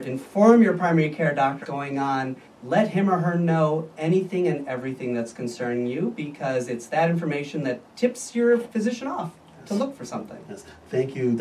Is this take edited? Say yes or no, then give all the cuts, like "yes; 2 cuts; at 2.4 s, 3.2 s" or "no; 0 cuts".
yes; 3 cuts; at 1.6 s, 2.5 s, 7.8 s